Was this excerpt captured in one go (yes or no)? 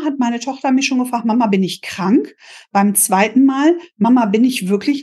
yes